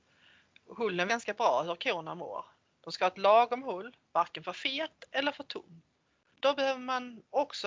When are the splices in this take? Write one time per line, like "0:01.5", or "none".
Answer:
0:01.1